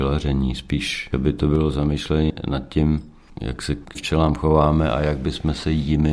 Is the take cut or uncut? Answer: cut